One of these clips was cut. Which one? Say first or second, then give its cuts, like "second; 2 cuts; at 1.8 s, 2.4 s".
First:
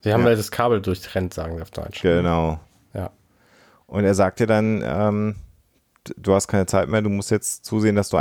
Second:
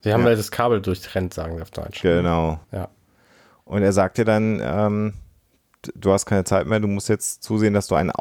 second; 1 cut; at 2.6 s